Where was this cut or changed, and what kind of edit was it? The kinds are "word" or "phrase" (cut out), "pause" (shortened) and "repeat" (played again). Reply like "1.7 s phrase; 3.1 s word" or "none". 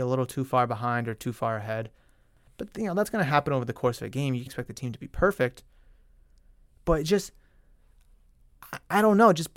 4.5 s word